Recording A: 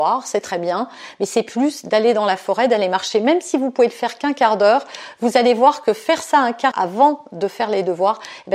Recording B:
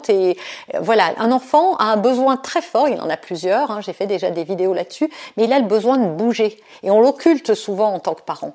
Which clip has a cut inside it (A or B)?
A